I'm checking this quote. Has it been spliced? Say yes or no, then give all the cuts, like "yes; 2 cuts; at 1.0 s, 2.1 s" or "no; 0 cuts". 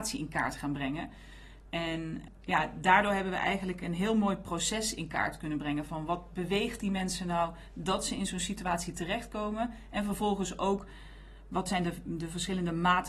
no; 0 cuts